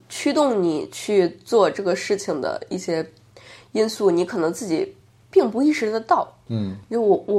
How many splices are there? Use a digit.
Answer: 0